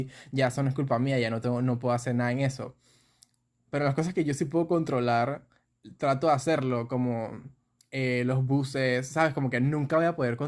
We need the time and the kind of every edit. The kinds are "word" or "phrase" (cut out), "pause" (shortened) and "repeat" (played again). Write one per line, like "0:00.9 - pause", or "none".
none